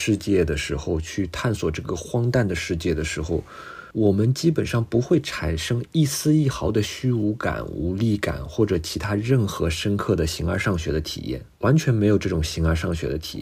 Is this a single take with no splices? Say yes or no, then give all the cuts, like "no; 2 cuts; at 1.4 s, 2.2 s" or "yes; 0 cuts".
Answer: no; 2 cuts; at 3.9 s, 11.5 s